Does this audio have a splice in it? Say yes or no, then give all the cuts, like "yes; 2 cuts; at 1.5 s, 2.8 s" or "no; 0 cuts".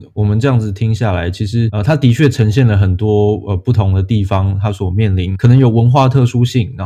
no; 0 cuts